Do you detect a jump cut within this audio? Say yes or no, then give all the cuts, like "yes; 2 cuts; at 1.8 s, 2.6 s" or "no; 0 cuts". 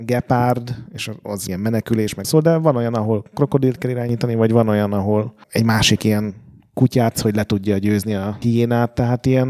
yes; 5 cuts; at 1.5 s, 2.2 s, 5.4 s, 7.1 s, 8.4 s